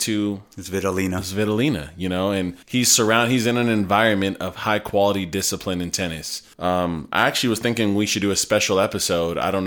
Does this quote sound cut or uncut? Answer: cut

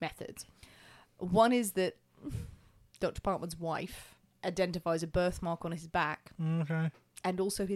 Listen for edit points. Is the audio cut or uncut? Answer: uncut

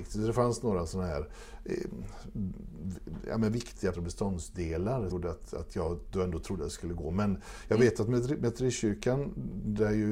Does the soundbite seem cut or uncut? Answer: cut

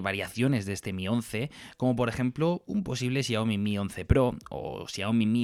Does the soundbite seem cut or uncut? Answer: uncut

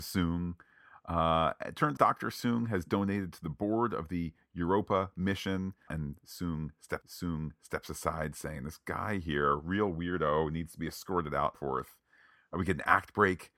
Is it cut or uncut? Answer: cut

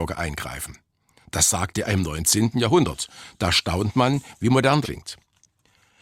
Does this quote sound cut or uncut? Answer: cut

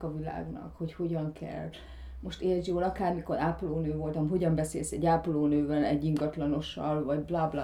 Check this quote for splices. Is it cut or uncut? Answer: uncut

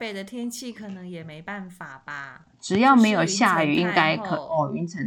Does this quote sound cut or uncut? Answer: cut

